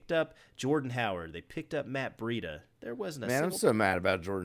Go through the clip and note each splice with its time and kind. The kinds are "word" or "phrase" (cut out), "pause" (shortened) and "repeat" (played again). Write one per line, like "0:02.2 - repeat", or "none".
none